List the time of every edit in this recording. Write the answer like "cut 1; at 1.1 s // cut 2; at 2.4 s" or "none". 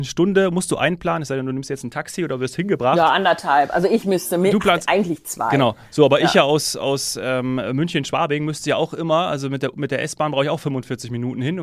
none